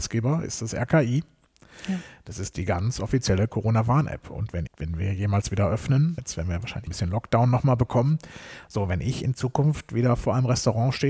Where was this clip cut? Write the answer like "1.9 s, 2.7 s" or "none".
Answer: 4.7 s, 6.2 s, 6.9 s